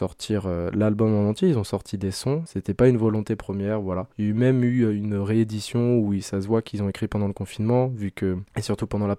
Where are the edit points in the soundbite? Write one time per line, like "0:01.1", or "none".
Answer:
0:04.1